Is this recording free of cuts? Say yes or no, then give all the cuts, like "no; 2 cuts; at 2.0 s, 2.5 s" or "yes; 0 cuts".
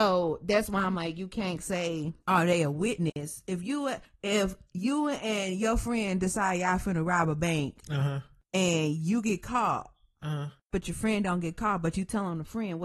yes; 0 cuts